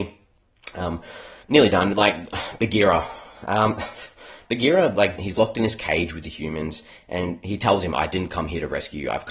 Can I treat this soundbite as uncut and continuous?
no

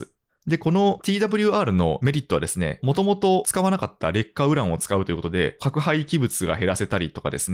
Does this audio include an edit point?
no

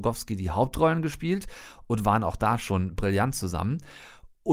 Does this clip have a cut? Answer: no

